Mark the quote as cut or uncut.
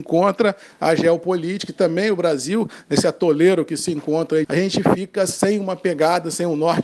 cut